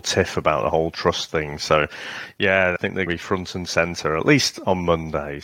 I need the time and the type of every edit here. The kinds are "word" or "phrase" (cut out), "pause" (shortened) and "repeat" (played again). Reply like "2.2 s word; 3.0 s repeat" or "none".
2.8 s word; 3.1 s word